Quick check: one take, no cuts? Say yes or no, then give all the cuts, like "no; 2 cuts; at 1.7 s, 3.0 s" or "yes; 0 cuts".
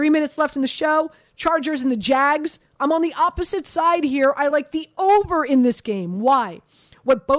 yes; 0 cuts